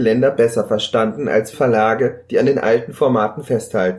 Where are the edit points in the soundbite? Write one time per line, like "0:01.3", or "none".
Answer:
0:01.5